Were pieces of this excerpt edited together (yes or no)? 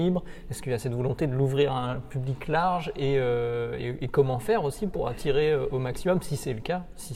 no